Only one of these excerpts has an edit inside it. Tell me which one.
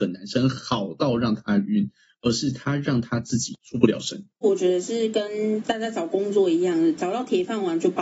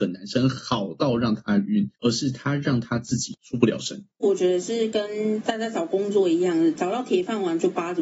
second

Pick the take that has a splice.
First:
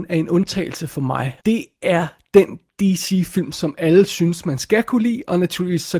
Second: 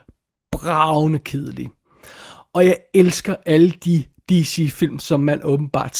first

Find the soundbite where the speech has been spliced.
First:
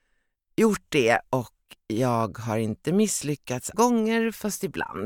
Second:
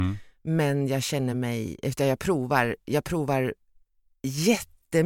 first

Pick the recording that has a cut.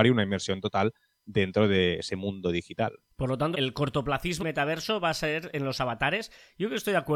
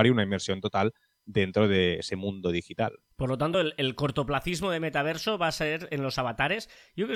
first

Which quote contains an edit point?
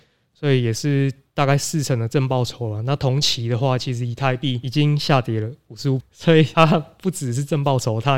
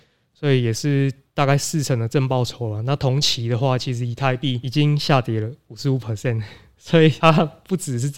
first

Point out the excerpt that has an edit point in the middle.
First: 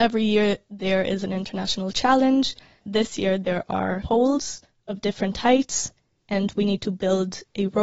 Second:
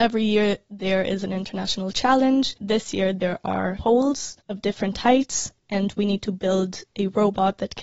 second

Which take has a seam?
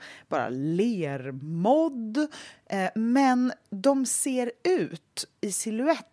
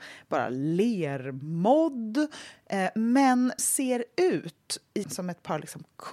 second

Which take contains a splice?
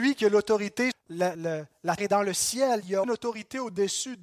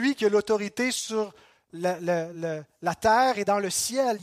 first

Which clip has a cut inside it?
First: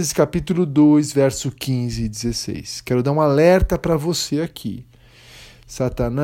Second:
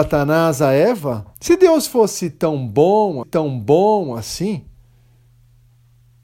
second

